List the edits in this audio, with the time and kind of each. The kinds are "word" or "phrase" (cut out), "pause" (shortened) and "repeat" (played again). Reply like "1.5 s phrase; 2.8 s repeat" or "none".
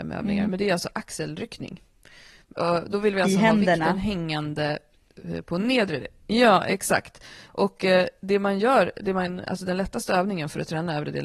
none